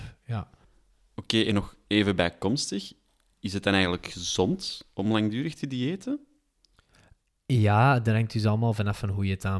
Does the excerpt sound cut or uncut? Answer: uncut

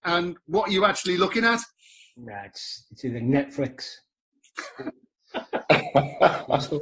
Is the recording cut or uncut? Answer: uncut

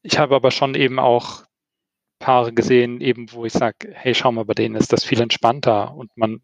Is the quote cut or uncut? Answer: uncut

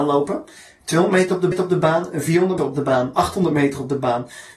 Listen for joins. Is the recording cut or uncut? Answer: cut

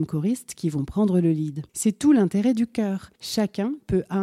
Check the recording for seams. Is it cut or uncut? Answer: cut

